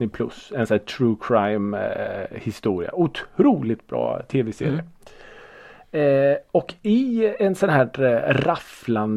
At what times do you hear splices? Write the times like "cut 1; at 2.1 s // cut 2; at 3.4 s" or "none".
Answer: none